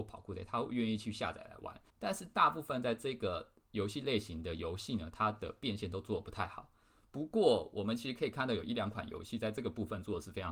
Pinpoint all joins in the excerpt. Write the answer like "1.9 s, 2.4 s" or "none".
1.9 s

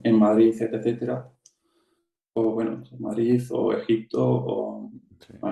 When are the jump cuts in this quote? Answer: none

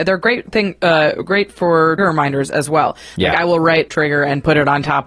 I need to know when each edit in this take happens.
2.0 s, 3.9 s

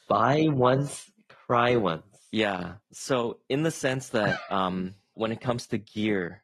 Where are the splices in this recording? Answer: none

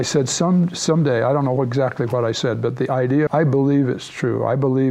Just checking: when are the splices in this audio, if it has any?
3.3 s

